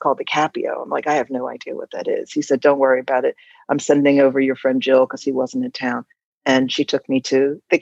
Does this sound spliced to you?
no; 0 cuts

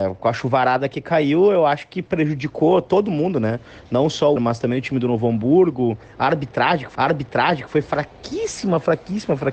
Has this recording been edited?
yes; 2 cuts; at 4.4 s, 6.9 s

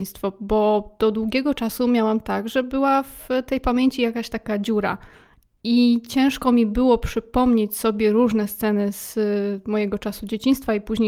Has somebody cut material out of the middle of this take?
no; 0 cuts

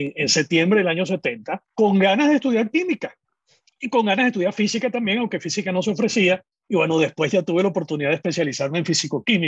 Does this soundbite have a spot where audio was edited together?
yes; 1 cut; at 1.7 s

